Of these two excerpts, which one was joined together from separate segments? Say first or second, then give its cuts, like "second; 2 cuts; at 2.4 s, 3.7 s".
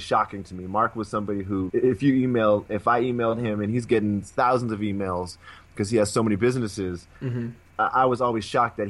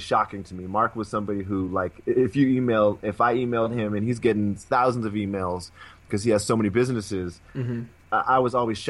first; 1 cut; at 1.7 s